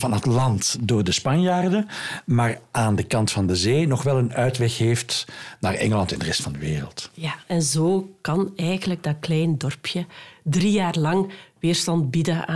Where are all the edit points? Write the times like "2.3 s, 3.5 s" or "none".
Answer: 7.4 s